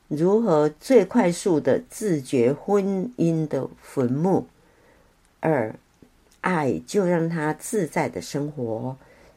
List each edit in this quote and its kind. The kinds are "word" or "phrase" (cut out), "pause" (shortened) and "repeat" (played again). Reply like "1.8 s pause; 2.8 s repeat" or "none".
none